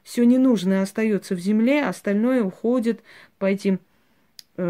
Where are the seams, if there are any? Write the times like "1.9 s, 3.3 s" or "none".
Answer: none